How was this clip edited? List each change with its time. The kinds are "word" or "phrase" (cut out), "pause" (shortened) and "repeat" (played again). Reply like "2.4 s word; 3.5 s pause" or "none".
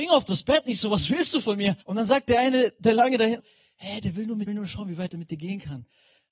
1.8 s pause; 3.4 s word; 4.5 s phrase